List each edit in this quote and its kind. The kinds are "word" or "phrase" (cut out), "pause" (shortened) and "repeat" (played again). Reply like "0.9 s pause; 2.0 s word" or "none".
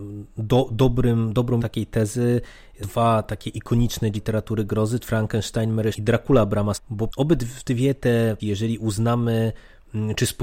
1.6 s word; 2.8 s word; 4.1 s word; 5.0 s word; 5.9 s word; 6.7 s word; 7.1 s word; 8.4 s word